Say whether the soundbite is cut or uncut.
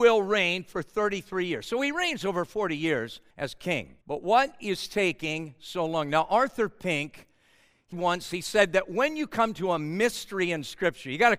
cut